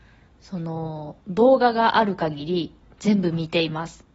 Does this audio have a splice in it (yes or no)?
yes